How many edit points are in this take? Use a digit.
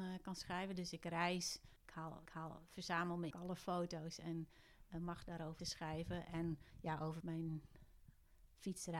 6